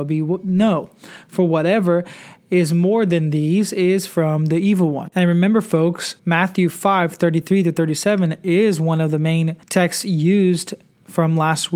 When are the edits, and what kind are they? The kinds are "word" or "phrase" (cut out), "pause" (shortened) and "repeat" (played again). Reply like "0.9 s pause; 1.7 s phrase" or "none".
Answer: 6.2 s pause; 9.6 s pause